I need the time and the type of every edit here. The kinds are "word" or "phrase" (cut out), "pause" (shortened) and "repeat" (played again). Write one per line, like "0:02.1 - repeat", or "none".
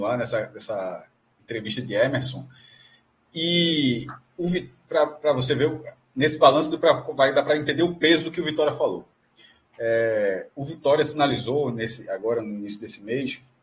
none